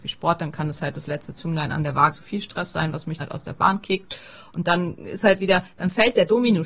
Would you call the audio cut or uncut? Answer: cut